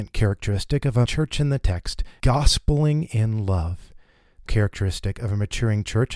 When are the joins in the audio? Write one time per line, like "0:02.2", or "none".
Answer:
0:01.1
0:02.2
0:04.5